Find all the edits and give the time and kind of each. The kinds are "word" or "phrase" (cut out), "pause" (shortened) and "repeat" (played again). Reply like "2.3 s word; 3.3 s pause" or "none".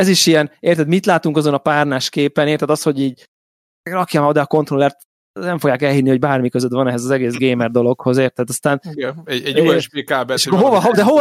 none